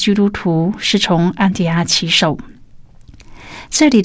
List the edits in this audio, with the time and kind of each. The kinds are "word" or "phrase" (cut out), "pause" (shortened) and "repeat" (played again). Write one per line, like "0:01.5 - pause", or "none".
0:02.8 - pause